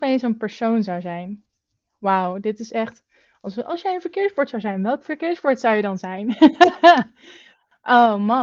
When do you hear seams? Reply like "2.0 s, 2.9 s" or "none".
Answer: none